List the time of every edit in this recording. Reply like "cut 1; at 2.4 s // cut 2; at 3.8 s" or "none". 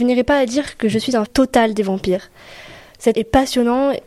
cut 1; at 1.3 s // cut 2; at 3.1 s